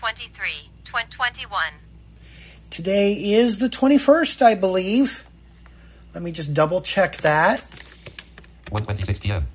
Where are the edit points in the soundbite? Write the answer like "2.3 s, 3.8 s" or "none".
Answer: none